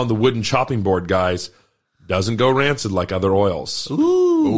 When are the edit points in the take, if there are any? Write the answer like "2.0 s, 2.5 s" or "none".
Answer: none